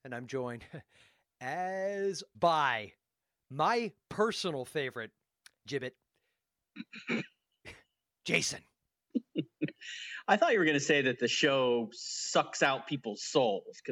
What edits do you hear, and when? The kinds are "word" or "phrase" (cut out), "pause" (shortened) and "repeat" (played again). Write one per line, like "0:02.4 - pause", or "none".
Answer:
0:02.3 - word
0:05.7 - word

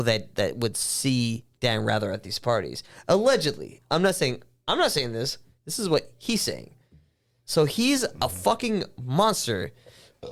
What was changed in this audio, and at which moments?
none

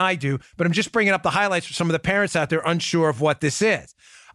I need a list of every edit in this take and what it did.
none

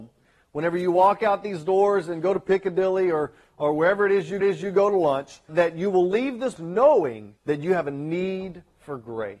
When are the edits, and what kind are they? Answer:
0:04.4 - repeat
0:05.5 - word
0:06.6 - word
0:07.4 - pause

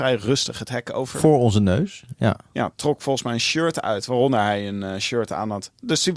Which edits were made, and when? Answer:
none

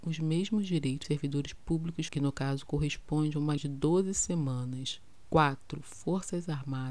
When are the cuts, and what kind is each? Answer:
0:01.0 - word
0:02.1 - word
0:03.6 - word

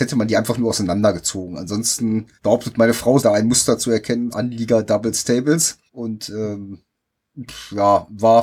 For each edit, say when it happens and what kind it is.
0:02.3 - pause
0:03.2 - word
0:04.3 - phrase
0:05.9 - pause

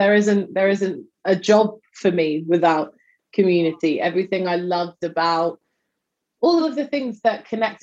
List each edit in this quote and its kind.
0:06.6 - phrase

